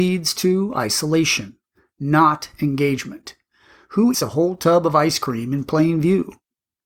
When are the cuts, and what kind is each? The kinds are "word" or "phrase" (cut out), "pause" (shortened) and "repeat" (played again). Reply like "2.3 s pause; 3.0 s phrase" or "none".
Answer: 4.1 s word